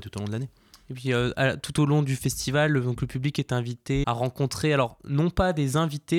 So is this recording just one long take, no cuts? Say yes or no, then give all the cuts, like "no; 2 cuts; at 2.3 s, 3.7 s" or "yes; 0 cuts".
no; 1 cut; at 4.0 s